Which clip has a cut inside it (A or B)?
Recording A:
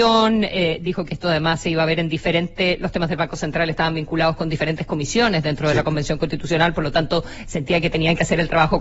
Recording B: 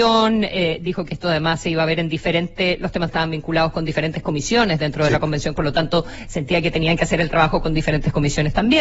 B